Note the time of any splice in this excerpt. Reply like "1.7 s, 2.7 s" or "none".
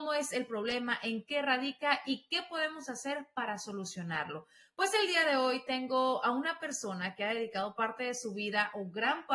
none